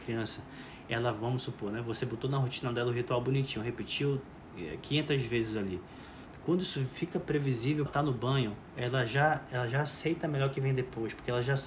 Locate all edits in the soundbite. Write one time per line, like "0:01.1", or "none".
0:07.9